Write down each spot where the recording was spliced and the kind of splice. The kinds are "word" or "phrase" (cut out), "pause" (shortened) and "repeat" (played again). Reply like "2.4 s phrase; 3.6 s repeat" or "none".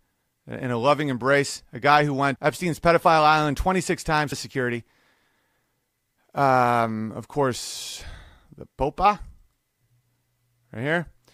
2.4 s phrase; 4.3 s word